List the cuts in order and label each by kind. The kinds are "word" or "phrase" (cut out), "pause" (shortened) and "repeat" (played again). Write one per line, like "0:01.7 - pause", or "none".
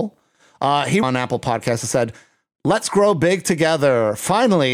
0:01.0 - phrase